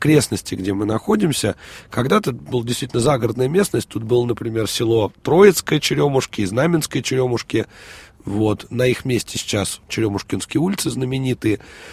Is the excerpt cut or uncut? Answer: cut